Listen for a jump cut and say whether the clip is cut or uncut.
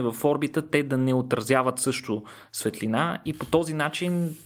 uncut